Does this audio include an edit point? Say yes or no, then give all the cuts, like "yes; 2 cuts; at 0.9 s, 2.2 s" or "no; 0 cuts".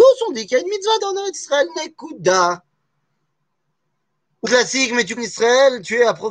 yes; 3 cuts; at 1.0 s, 4.4 s, 5.2 s